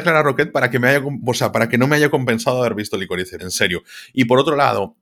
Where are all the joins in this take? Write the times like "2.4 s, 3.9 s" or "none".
3.4 s